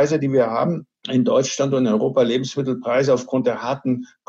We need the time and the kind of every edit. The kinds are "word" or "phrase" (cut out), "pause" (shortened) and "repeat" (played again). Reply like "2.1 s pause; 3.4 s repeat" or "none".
1.0 s pause